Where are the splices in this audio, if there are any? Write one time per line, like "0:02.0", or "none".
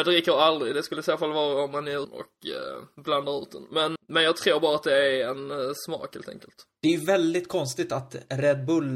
0:02.0
0:04.0